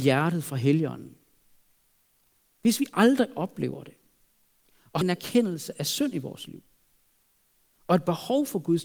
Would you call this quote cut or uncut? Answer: cut